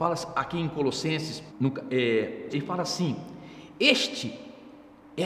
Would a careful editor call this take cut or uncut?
cut